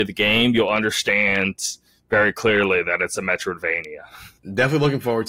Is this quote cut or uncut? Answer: uncut